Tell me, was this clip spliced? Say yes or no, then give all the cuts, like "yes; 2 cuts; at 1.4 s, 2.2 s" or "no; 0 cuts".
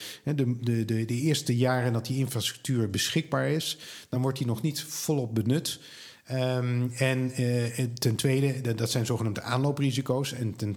no; 0 cuts